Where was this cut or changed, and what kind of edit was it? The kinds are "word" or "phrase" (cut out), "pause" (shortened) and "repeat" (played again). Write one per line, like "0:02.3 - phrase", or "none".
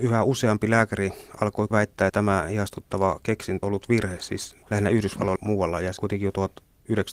0:01.7 - word
0:02.1 - word
0:03.6 - word
0:04.6 - word
0:05.4 - word
0:06.0 - word